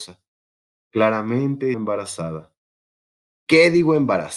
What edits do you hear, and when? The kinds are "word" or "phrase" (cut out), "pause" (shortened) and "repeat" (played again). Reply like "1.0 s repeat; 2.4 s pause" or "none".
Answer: 1.7 s word